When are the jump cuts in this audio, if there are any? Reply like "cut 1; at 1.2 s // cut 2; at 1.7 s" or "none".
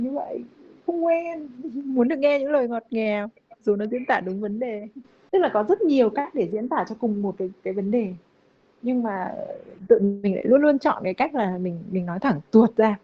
none